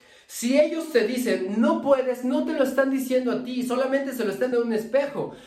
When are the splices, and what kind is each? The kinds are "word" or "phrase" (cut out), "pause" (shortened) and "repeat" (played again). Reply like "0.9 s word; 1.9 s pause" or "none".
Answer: 4.5 s word